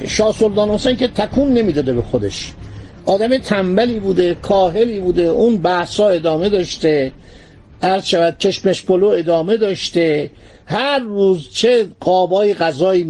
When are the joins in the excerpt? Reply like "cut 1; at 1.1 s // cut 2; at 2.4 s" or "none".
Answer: none